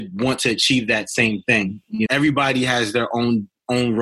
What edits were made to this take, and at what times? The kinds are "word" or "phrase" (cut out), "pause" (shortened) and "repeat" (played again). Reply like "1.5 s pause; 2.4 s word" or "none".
2.1 s word